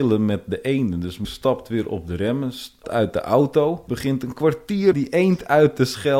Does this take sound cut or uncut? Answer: cut